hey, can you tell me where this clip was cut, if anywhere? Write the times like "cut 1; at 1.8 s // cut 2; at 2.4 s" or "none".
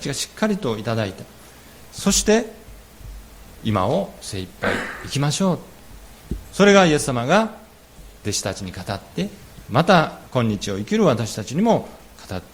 none